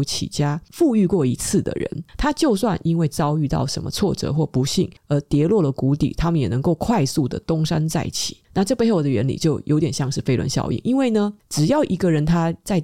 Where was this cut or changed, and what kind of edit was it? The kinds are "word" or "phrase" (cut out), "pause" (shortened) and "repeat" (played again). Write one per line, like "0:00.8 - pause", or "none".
0:08.4 - pause